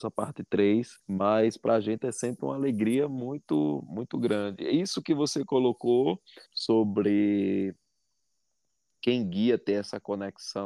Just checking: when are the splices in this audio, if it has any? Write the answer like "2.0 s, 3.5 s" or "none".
1.0 s, 6.5 s